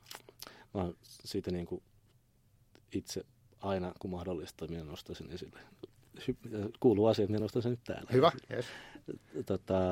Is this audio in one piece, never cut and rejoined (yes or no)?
yes